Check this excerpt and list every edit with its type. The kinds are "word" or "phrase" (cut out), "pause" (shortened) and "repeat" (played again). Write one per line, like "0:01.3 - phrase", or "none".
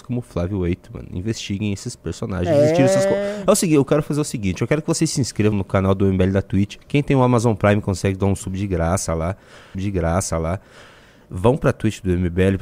0:05.5 - word
0:06.8 - pause
0:09.7 - repeat

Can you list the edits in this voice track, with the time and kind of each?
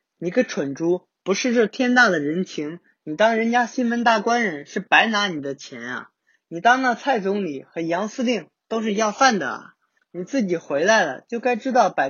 none

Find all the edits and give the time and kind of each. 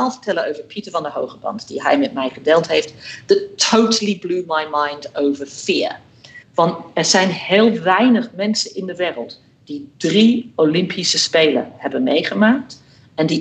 0:06.4 - pause

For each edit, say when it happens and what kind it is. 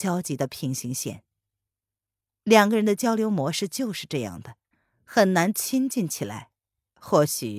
none

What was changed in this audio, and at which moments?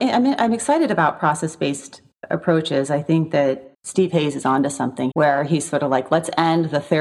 0:03.7 - word
0:05.1 - word

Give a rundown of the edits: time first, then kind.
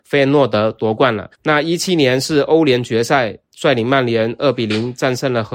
0:01.3 - pause

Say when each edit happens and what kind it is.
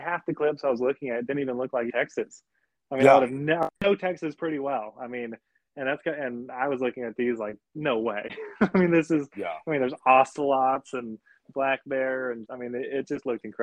0:01.9 - phrase
0:03.8 - pause
0:12.5 - word

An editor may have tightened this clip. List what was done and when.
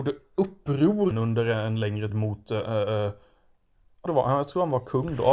0:01.1 - word
0:02.1 - word
0:04.1 - phrase

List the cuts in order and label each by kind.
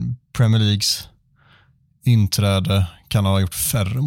none

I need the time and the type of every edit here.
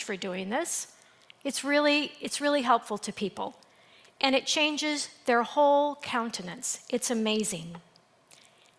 none

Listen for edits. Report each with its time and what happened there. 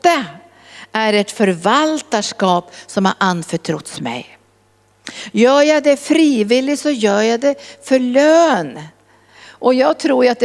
none

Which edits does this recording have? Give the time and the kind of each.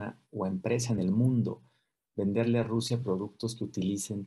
none

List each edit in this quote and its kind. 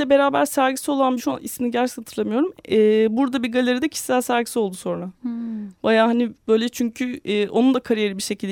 0:01.2 - word

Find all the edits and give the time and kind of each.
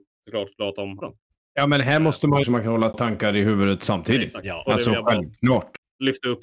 0:01.0 - word
0:02.4 - phrase
0:02.9 - word

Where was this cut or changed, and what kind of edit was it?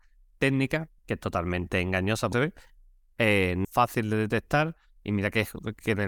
0:01.0 - pause
0:02.3 - phrase
0:03.6 - phrase

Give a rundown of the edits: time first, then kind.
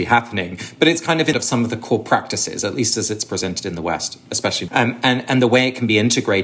0:01.3 - phrase
0:04.7 - phrase

